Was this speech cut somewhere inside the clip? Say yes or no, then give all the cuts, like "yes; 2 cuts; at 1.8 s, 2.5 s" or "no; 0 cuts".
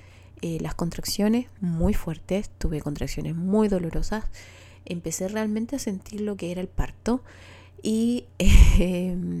no; 0 cuts